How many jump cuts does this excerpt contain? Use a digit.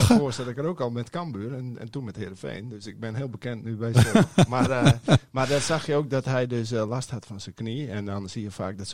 0